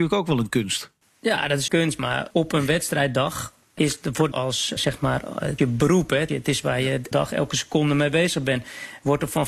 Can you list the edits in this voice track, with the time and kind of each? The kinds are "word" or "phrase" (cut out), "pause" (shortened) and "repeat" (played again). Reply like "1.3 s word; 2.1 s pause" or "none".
1.7 s word; 2.3 s word; 3.8 s word; 4.3 s word; 4.8 s word; 5.6 s word; 6.3 s word; 7.1 s word

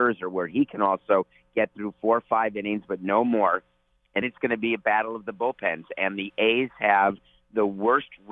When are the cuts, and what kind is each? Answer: 4.2 s word

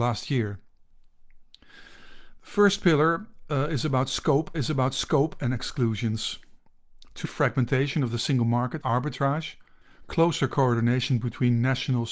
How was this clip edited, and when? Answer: 4.5 s repeat; 7.2 s word; 8.8 s phrase

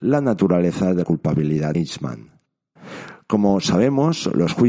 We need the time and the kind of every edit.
1.0 s word; 1.7 s word

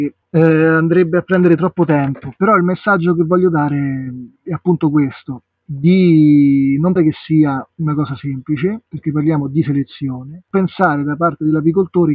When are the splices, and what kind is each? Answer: 4.4 s pause; 7.0 s word; 8.9 s pause

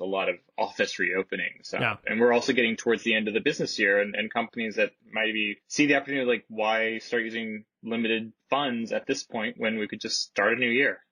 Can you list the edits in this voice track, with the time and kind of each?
5.6 s pause

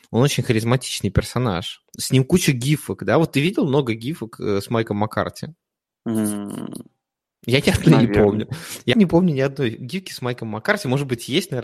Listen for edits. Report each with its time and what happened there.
1.9 s pause; 5.8 s pause; 8.9 s word

